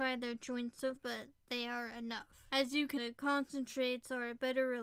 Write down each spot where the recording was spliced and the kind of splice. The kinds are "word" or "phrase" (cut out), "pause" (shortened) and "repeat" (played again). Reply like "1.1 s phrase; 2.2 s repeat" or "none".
1.0 s word; 1.4 s pause; 2.5 s pause; 3.0 s word